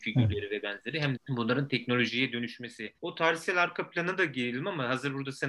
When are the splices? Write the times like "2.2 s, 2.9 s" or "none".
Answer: 1.2 s, 3.0 s